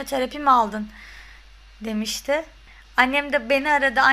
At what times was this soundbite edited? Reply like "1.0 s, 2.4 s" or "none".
none